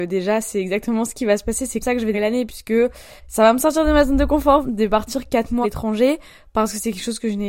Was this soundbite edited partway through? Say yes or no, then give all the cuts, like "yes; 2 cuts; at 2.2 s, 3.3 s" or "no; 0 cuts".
yes; 5 cuts; at 1.8 s, 2.1 s, 3.2 s, 4.6 s, 5.6 s